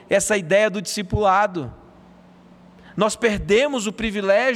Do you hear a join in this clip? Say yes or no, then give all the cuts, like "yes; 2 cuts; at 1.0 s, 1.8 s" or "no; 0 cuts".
no; 0 cuts